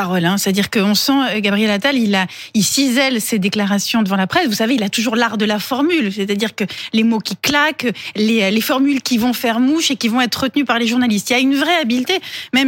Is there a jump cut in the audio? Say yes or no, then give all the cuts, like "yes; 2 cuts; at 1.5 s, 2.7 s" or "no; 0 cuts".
no; 0 cuts